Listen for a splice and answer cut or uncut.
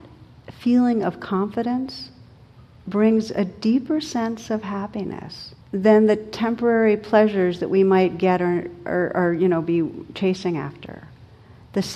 cut